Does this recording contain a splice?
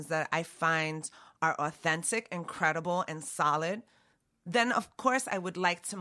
no; 0 cuts

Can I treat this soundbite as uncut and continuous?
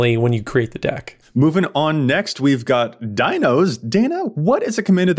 yes; 0 cuts

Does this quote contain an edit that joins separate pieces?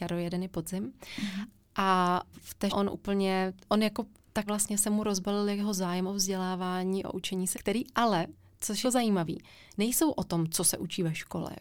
yes; 6 cuts; at 2.3 s, 2.7 s, 3.6 s, 4.5 s, 7.5 s, 8.8 s

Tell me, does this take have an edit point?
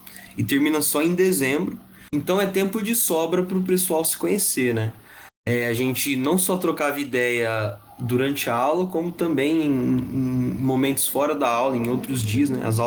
no; 0 cuts

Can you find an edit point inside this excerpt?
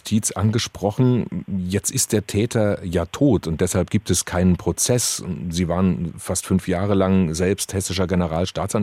no; 0 cuts

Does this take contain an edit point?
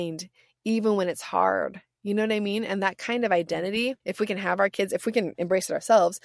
yes; 1 cut; at 4.0 s

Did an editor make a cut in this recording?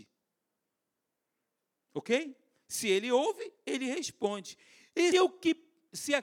yes; 1 cut; at 5.1 s

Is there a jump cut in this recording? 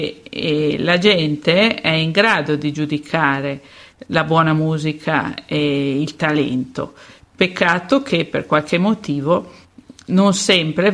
no; 0 cuts

